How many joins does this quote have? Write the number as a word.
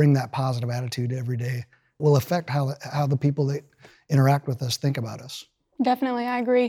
one